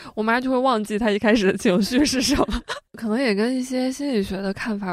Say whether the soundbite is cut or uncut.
cut